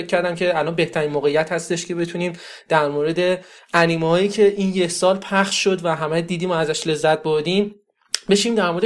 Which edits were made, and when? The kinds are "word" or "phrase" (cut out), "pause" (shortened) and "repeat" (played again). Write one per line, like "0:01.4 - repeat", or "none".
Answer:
none